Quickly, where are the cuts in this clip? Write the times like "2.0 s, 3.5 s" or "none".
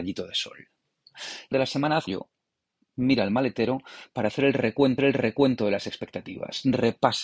1.5 s, 2.1 s, 5.0 s